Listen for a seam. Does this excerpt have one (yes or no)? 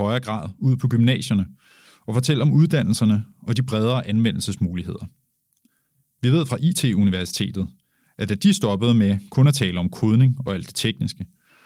no